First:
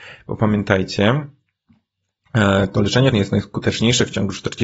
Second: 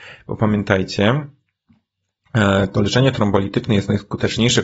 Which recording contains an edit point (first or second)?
first